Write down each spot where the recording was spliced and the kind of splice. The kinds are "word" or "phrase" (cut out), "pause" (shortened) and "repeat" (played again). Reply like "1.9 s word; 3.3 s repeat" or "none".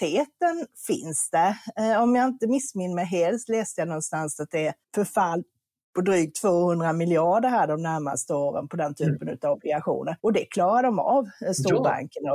4.8 s pause; 10.2 s pause